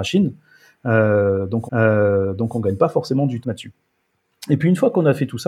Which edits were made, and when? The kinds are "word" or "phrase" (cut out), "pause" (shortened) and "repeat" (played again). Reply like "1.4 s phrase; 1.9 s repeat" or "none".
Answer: 1.7 s repeat; 3.4 s word